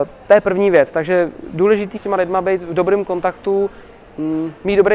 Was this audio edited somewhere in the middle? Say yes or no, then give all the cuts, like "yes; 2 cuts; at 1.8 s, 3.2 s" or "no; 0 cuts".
yes; 1 cut; at 2.0 s